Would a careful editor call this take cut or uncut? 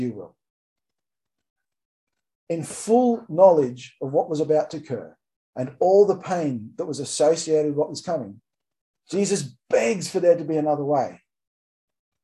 uncut